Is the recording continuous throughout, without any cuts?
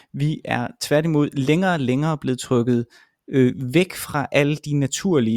yes; 0 cuts

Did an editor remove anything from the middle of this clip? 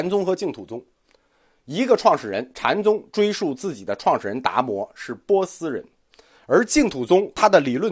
no; 0 cuts

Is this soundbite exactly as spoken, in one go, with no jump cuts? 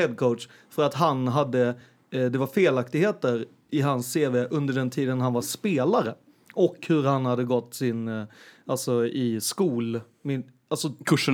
yes; 0 cuts

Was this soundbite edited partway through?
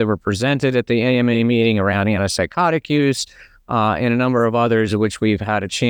no; 0 cuts

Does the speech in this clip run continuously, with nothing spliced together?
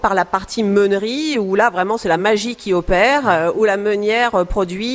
yes; 0 cuts

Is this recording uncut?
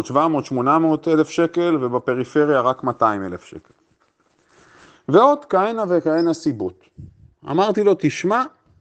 yes; 0 cuts

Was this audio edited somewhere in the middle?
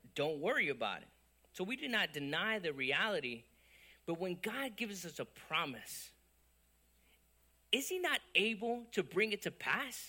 no; 0 cuts

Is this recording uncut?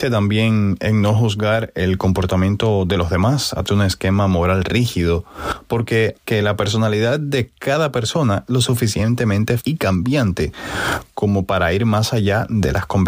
no; 4 cuts; at 3.7 s, 6.2 s, 8.5 s, 9.6 s

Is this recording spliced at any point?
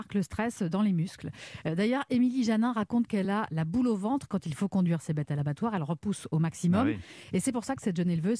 no; 0 cuts

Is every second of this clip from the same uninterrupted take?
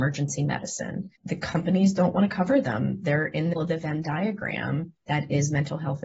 no; 3 cuts; at 1.2 s, 3.6 s, 5.0 s

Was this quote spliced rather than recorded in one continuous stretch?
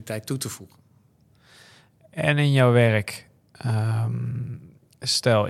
no; 0 cuts

